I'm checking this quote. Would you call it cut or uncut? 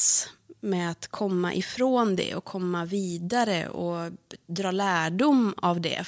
uncut